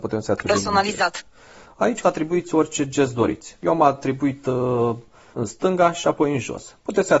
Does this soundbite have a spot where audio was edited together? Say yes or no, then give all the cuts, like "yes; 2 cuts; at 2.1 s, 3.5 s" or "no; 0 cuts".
yes; 2 cuts; at 2.0 s, 5.3 s